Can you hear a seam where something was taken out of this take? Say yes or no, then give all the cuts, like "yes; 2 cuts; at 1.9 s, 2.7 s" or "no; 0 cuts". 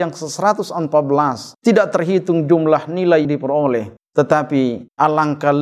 yes; 2 cuts; at 1.5 s, 3.2 s